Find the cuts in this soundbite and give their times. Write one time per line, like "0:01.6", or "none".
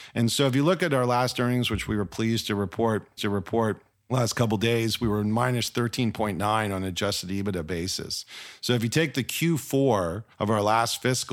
0:03.2
0:10.3